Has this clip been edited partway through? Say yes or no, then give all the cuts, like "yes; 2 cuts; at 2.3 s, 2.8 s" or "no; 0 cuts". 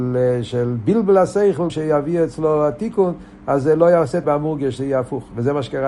yes; 2 cuts; at 1.7 s, 4.2 s